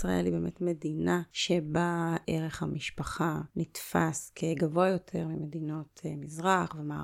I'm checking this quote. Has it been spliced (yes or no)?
no